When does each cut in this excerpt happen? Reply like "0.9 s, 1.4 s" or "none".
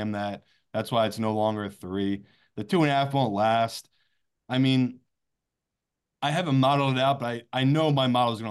none